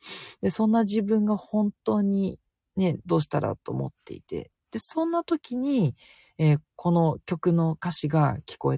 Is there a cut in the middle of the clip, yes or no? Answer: no